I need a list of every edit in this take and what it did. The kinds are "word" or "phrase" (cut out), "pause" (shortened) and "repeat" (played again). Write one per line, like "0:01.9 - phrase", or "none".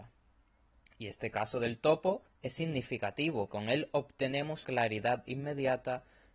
0:02.3 - pause
0:03.5 - word
0:04.6 - word